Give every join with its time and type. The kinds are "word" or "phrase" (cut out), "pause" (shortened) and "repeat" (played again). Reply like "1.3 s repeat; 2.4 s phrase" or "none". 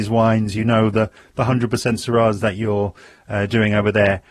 none